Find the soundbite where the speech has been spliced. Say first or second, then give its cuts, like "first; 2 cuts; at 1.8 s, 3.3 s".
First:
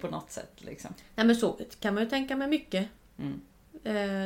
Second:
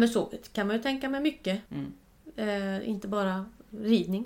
second; 1 cut; at 1.7 s